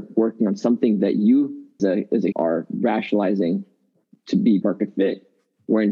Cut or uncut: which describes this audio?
cut